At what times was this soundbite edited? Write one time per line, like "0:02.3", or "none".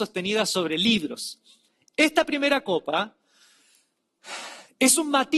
none

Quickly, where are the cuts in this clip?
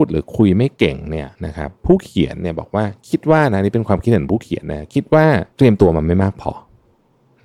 0:01.3
0:05.5

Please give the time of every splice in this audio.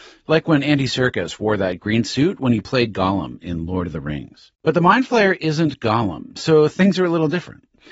0:04.5

